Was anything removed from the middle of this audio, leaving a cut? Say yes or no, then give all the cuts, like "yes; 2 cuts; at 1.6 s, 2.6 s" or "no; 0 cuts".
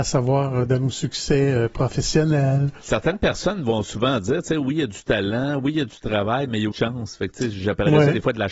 yes; 1 cut; at 6.7 s